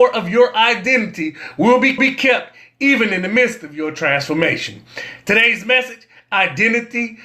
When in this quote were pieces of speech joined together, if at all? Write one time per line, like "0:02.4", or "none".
0:02.0